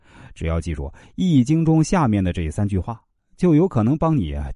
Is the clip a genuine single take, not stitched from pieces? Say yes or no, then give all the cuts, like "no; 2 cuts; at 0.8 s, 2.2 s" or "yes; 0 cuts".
yes; 0 cuts